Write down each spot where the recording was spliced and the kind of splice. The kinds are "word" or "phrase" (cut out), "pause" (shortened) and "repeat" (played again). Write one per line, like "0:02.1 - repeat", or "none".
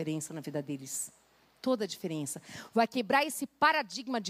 none